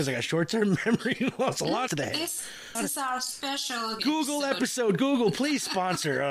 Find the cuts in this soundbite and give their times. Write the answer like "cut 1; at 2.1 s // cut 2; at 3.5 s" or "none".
cut 1; at 1.9 s // cut 2; at 2.7 s // cut 3; at 4.0 s